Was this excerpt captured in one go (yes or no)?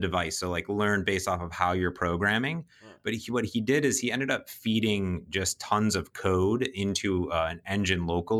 yes